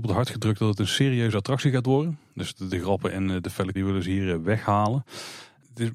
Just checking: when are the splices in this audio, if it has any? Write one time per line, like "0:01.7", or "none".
0:03.7